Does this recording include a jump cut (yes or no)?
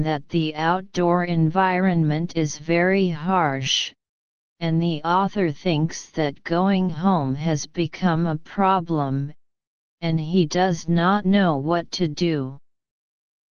no